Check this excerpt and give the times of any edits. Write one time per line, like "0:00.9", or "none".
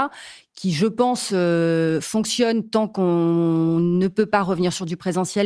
none